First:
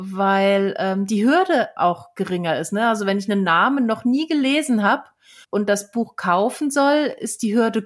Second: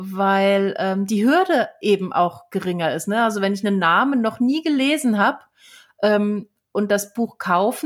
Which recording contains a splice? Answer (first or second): first